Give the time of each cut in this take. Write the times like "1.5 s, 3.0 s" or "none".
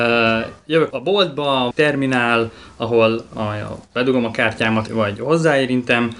0.9 s, 1.7 s, 3.3 s, 4.9 s

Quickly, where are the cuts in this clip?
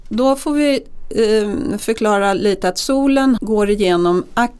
3.4 s

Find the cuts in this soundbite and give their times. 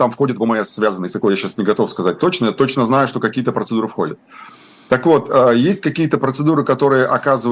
none

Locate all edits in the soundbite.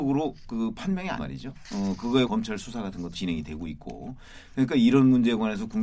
1.2 s, 2.3 s, 3.1 s

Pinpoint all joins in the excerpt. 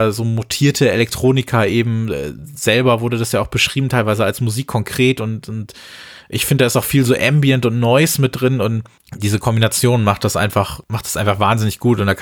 none

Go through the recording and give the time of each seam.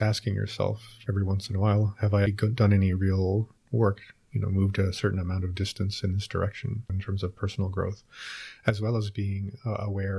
2.3 s

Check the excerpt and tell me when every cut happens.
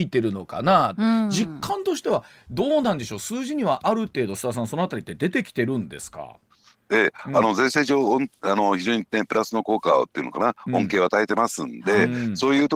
none

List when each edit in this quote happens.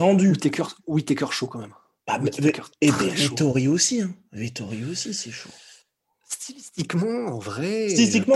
none

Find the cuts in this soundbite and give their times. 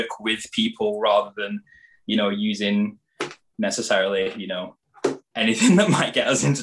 none

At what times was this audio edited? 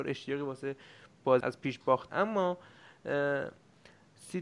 1.4 s, 2.1 s

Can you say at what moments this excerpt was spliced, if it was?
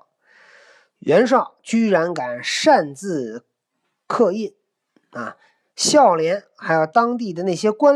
none

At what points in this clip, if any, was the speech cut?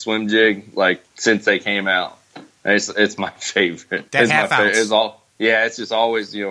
1.1 s, 4.1 s, 5.3 s

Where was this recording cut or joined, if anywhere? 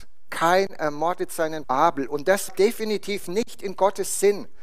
1.6 s, 2.5 s

